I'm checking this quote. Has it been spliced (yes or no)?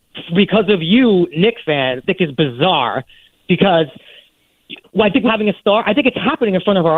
yes